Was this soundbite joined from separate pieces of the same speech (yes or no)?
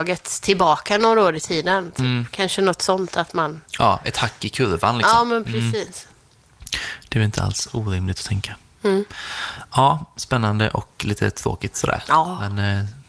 no